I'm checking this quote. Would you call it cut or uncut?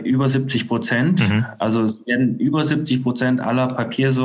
uncut